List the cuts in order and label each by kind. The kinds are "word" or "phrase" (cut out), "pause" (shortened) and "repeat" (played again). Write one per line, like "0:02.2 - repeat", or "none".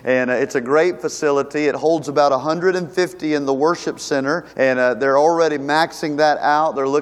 0:04.5 - pause